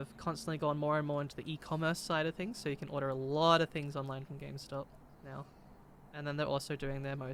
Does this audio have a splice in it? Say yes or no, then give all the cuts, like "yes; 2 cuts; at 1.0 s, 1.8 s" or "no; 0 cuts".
yes; 1 cut; at 6.1 s